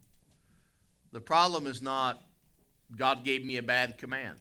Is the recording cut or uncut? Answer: uncut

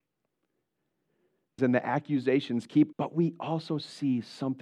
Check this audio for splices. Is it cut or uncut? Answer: cut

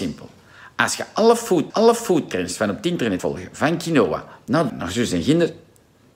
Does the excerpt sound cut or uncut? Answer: cut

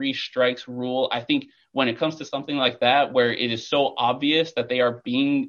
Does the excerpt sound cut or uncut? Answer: uncut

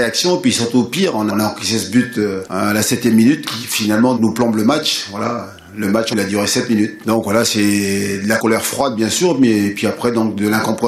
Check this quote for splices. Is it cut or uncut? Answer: cut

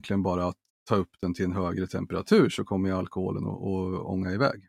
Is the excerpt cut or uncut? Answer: uncut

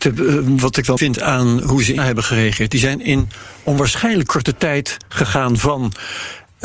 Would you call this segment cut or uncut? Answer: cut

